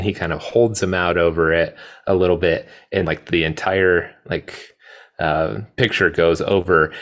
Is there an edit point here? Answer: yes; 1 cut; at 3.0 s

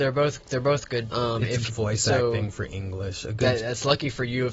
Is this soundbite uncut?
no; 2 cuts; at 1.1 s, 1.7 s

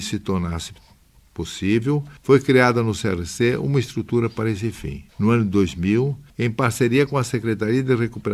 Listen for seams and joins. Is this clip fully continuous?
no; 3 cuts; at 2.2 s, 5.1 s, 6.3 s

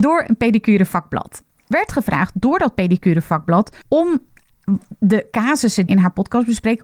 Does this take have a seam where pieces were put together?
yes; 3 cuts; at 1.7 s, 3.8 s, 5.9 s

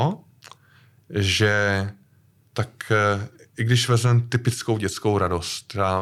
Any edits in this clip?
no; 0 cuts

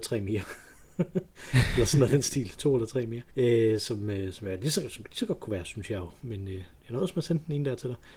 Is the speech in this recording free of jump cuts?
no; 1 cut; at 3.3 s

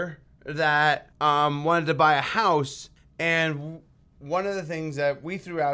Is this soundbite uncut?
no; 2 cuts; at 1.1 s, 3.0 s

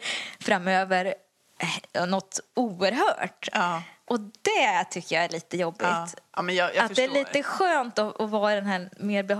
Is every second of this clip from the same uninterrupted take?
yes; 0 cuts

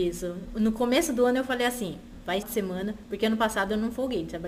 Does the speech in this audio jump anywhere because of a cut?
yes; 1 cut; at 2.4 s

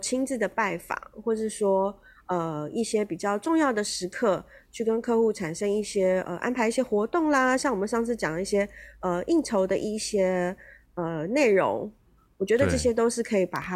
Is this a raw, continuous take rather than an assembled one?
yes; 0 cuts

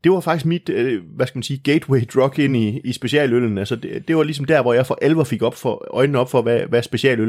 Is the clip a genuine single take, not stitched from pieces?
yes; 0 cuts

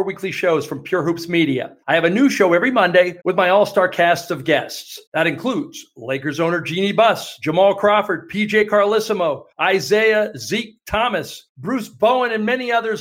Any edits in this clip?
yes; 5 cuts; at 1.8 s, 3.2 s, 5.1 s, 9.5 s, 11.5 s

